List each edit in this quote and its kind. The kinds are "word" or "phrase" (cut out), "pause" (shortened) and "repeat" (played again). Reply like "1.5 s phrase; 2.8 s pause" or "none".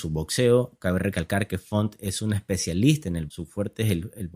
3.3 s word